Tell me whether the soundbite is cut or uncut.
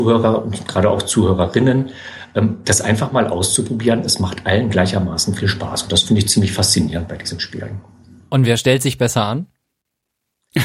uncut